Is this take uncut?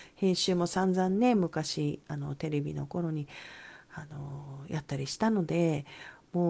yes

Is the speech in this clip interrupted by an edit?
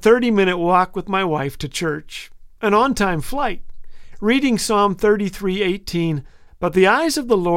no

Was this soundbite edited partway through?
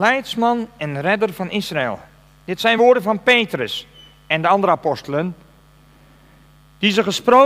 no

